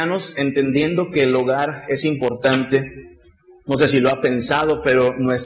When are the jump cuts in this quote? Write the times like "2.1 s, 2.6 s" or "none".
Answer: none